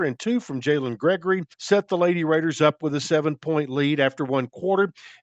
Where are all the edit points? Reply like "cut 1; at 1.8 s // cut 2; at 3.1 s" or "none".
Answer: cut 1; at 1.5 s